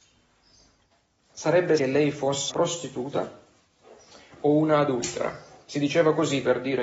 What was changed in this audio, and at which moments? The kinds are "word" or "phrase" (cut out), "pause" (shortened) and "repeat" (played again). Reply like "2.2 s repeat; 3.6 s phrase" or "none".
1.8 s phrase; 2.5 s word